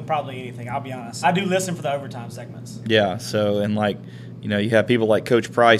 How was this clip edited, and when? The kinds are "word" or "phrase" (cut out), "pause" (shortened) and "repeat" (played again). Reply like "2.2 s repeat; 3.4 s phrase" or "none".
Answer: 1.2 s word